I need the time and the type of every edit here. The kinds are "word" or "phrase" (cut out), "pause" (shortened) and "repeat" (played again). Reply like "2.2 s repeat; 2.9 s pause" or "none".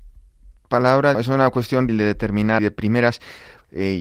1.1 s word; 1.9 s word; 2.6 s word